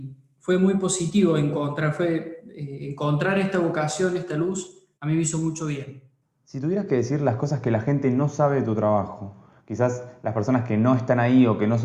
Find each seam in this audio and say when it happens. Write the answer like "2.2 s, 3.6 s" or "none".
none